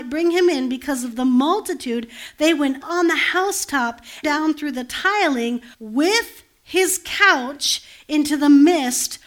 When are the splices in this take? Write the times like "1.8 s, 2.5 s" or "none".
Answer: 2.8 s, 4.2 s, 5.7 s